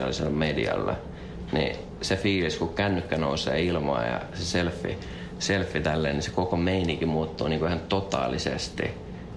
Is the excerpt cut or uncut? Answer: uncut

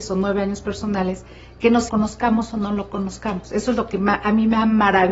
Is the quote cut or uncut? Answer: cut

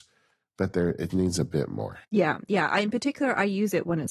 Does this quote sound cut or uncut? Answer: cut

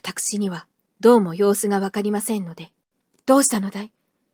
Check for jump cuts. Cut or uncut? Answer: uncut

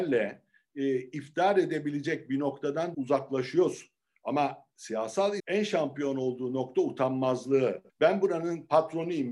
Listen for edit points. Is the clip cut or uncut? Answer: cut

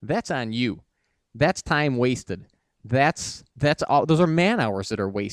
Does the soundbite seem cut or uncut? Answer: cut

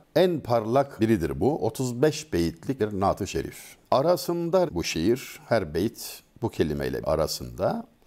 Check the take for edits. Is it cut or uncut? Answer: cut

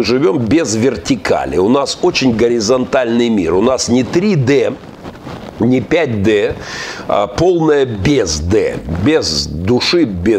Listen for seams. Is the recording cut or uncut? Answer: uncut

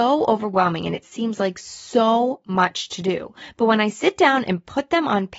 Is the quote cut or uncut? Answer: uncut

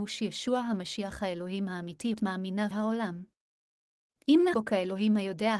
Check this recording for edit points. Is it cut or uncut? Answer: cut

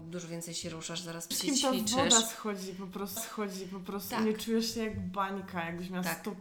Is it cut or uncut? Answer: cut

